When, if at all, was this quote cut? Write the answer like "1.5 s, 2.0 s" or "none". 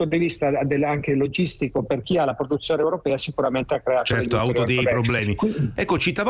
none